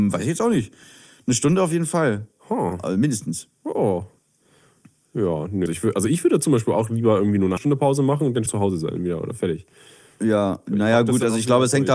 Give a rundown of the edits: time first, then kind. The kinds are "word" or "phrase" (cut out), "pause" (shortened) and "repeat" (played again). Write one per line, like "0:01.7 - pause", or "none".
0:05.7 - word
0:07.6 - word
0:08.5 - word